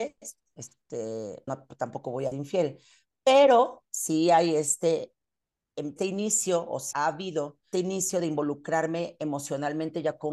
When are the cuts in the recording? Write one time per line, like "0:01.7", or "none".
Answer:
0:01.5
0:02.3
0:06.0
0:06.9
0:07.7